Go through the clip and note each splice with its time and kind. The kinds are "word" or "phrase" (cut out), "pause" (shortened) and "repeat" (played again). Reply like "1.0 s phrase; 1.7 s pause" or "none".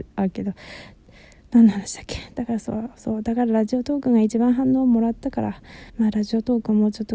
5.9 s pause